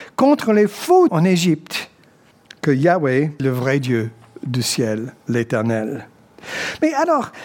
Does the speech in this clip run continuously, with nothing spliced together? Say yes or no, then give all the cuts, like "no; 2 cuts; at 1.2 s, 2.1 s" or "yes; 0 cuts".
no; 3 cuts; at 1.1 s, 2.3 s, 3.4 s